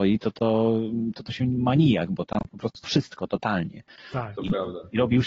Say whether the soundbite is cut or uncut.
cut